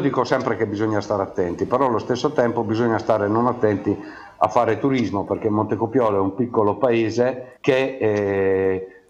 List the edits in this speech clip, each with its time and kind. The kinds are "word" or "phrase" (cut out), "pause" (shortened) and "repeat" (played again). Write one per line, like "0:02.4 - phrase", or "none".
0:07.6 - pause

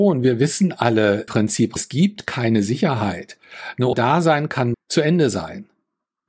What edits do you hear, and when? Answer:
0:01.3 - word
0:01.8 - word
0:03.9 - word
0:04.7 - word

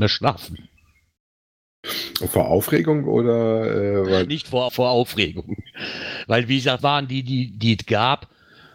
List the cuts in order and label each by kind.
0:04.3 - word
0:04.7 - phrase
0:06.8 - phrase

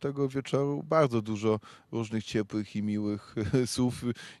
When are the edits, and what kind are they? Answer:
none

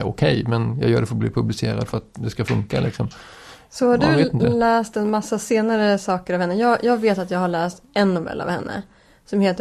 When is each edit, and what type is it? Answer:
none

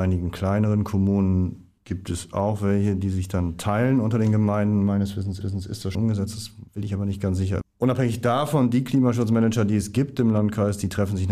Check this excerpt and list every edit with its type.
0:05.4 - repeat
0:05.9 - word
0:06.7 - pause

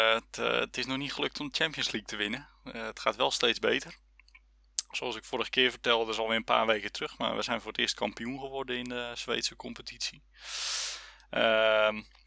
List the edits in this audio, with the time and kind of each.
none

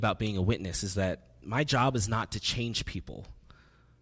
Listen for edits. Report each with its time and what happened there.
none

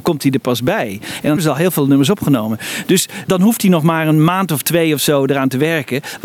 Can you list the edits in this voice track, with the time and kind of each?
0:01.4 - word

